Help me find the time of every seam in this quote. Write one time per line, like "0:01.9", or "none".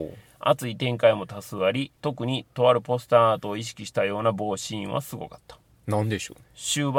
0:02.0